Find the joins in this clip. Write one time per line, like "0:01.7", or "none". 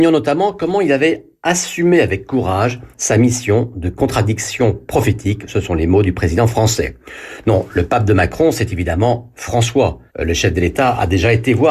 0:02.9
0:10.1